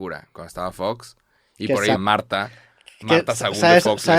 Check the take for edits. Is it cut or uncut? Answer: cut